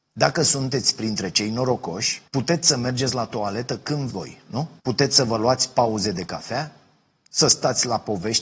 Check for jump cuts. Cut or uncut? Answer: cut